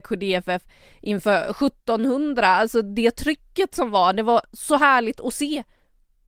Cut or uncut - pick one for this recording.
uncut